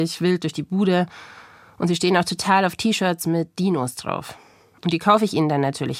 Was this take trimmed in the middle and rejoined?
no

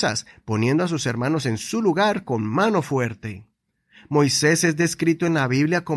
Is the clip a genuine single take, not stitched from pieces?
yes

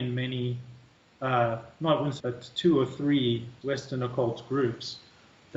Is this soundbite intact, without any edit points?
no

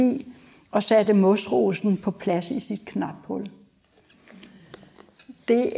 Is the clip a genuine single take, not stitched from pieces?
yes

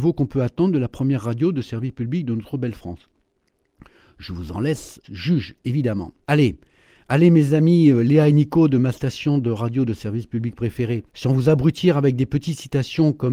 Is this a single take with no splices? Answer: no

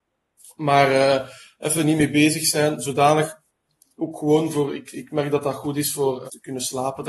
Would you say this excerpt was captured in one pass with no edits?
yes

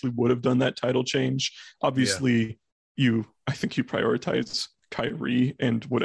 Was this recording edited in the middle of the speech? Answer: no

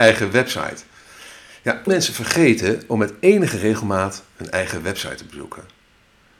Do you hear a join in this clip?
yes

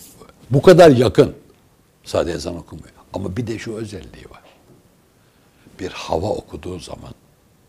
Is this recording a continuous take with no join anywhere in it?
yes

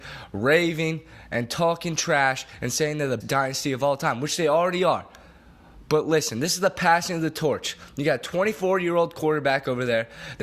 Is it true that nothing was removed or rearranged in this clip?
no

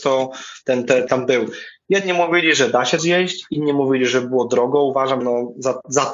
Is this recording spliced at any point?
yes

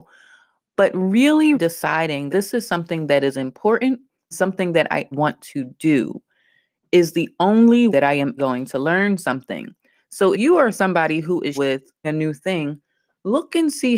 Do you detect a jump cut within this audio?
yes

